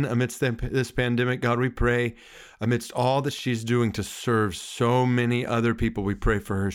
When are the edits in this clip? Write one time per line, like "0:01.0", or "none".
none